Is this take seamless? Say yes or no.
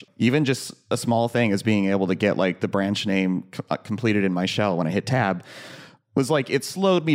yes